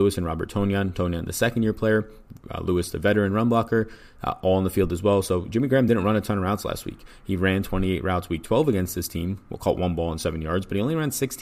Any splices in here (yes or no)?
no